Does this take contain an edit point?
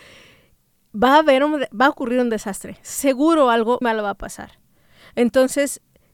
yes; 1 cut; at 3.8 s

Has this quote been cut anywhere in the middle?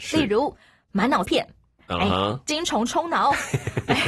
yes; 1 cut; at 1.2 s

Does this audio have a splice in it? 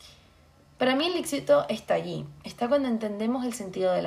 no; 0 cuts

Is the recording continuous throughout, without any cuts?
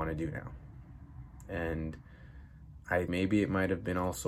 no; 1 cut; at 3.1 s

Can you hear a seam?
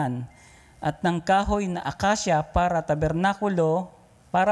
no; 0 cuts

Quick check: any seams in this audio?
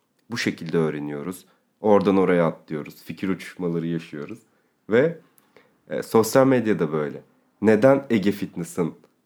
no; 0 cuts

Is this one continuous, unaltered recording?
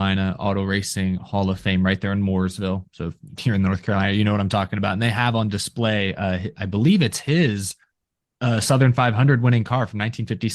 yes; 0 cuts

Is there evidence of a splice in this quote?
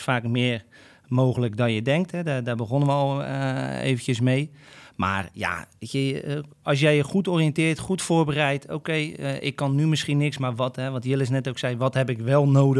yes; 1 cut; at 6.5 s

